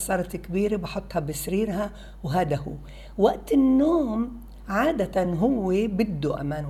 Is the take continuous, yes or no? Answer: yes